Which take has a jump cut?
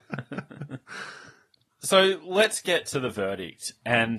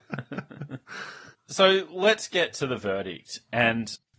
second; 1 cut; at 1.3 s

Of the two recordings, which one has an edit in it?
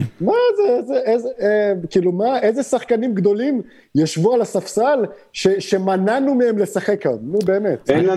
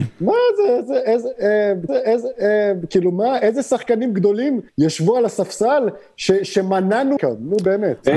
second; 3 cuts; at 1.9 s, 4.7 s, 7.2 s

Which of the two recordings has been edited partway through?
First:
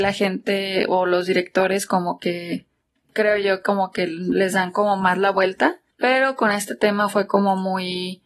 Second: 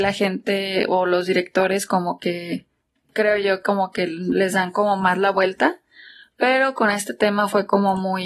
first; 1 cut; at 5.9 s

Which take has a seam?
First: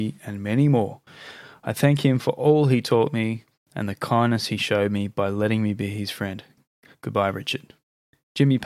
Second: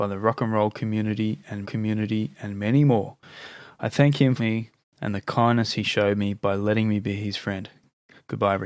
second; 2 cuts; at 1.6 s, 4.4 s

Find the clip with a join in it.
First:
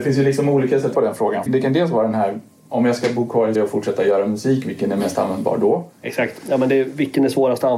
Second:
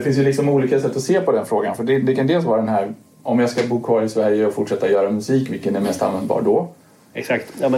first; 4 cuts; at 0.9 s, 1.5 s, 3.5 s, 5.9 s

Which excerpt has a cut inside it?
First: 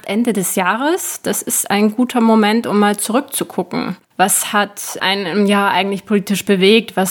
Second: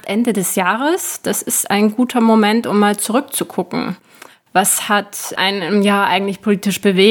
first; 1 cut; at 4.0 s

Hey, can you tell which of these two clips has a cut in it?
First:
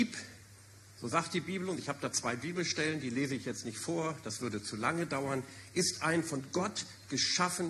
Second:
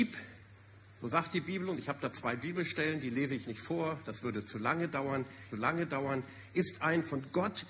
second; 2 cuts; at 3.4 s, 5.5 s

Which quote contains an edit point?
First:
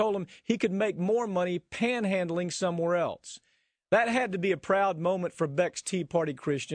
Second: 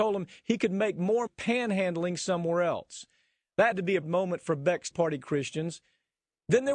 second; 4 cuts; at 1.3 s, 3.7 s, 4.0 s, 4.9 s

